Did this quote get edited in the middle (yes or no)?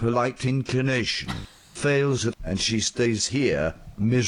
yes